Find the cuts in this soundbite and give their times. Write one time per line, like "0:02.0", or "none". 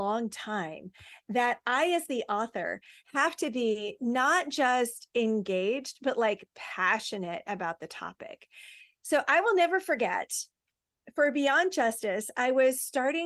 none